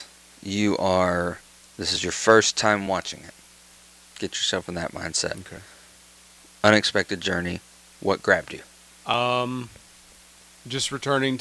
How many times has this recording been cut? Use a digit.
0